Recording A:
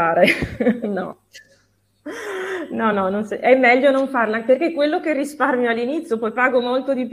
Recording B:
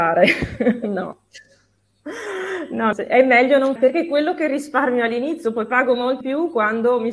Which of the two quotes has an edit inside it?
B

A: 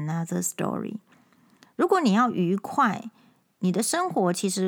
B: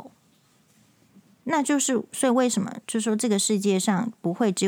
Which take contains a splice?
B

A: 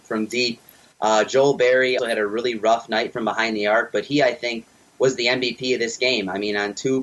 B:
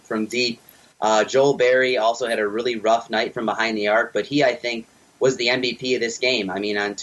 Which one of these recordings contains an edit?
A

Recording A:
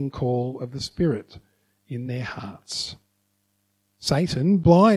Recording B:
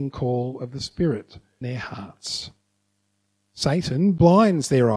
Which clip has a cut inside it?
B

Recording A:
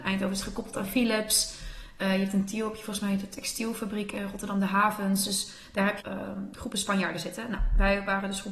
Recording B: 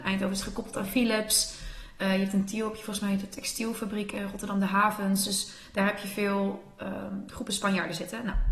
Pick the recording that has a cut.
A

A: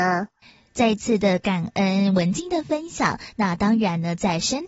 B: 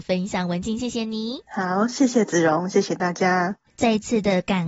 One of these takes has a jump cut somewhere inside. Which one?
B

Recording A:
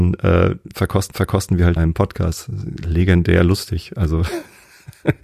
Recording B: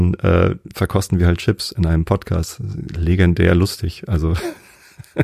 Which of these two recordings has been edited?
A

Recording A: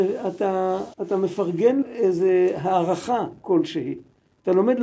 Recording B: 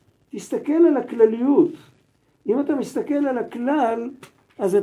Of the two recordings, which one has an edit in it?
A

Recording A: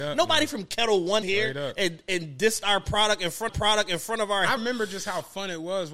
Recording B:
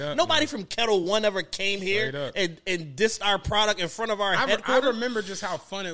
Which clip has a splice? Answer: A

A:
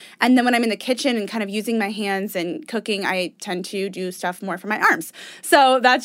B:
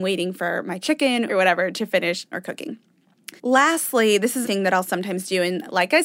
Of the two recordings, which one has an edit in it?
B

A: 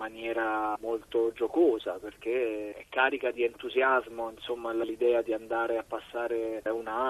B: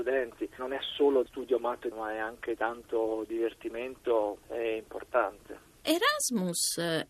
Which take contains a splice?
B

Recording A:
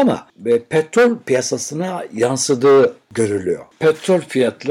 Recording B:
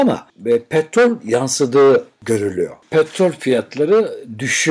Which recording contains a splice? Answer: B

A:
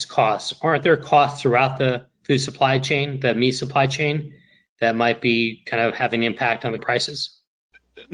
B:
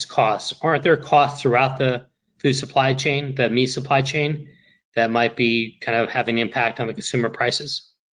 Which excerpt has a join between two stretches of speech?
A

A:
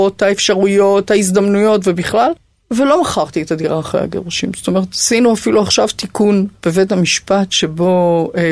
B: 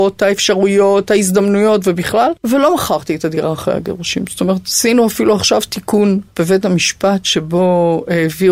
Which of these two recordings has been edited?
B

